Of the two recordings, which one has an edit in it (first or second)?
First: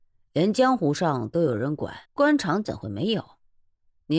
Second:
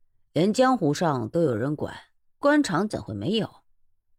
first